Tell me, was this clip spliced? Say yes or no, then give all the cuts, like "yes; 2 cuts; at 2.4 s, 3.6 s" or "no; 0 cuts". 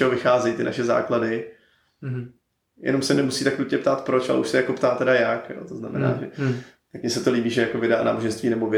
no; 0 cuts